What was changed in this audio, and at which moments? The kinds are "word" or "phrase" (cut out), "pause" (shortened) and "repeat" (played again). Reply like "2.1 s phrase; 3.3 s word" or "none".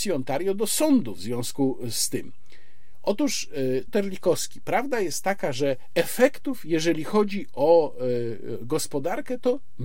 3.9 s word